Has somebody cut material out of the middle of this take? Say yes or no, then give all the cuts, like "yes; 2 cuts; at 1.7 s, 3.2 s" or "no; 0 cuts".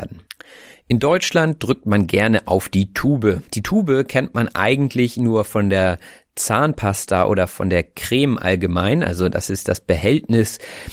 yes; 1 cut; at 3.5 s